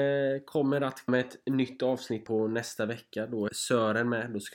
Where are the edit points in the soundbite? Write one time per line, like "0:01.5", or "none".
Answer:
0:01.1
0:02.3
0:03.5